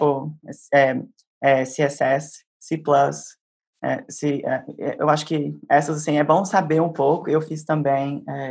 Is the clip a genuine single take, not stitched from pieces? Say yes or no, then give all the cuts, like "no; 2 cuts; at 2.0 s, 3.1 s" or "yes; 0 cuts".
yes; 0 cuts